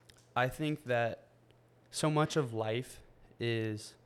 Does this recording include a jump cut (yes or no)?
no